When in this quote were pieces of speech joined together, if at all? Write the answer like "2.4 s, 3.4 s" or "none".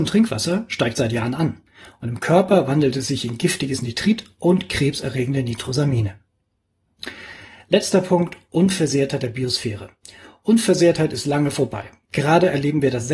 none

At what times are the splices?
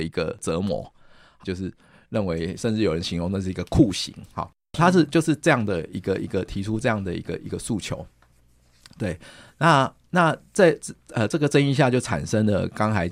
1.4 s

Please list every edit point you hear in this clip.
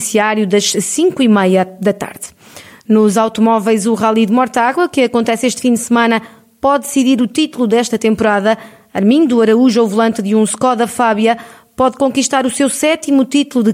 none

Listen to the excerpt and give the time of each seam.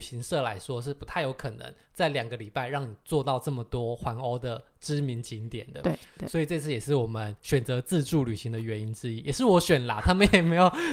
7.4 s

